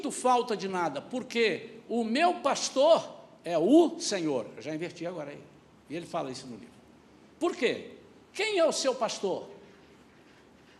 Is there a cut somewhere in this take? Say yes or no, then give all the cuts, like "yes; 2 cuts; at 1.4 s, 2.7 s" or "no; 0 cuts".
no; 0 cuts